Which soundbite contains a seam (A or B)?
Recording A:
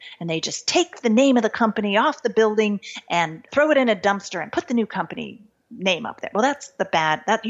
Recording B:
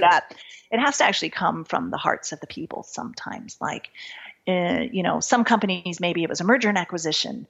A